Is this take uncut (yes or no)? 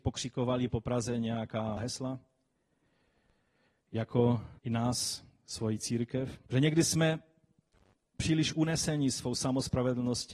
no